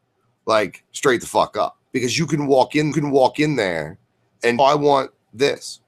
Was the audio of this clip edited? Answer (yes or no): yes